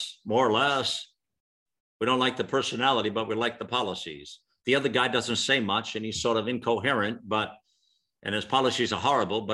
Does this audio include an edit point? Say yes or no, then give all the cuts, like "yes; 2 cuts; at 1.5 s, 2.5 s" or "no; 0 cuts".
no; 0 cuts